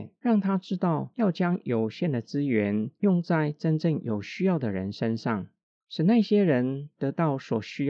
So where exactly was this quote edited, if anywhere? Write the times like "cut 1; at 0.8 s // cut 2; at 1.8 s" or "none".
none